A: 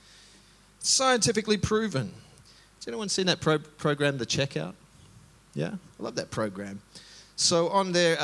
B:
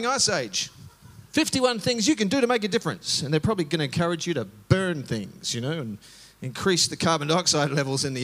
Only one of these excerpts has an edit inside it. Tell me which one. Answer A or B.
B